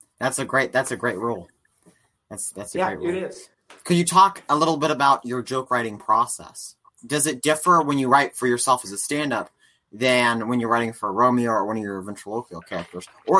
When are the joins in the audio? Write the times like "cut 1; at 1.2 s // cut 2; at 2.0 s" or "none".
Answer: none